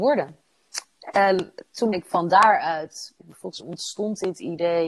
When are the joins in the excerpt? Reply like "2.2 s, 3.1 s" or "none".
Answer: 1.9 s, 3.2 s, 3.6 s